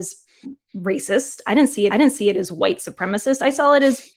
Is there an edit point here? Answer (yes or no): yes